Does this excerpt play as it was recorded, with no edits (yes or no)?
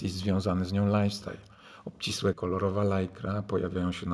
no